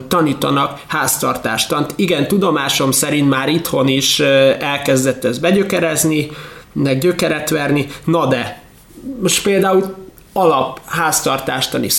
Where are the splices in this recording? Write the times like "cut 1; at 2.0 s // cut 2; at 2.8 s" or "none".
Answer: none